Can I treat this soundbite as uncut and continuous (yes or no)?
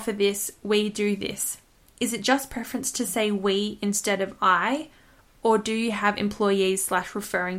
yes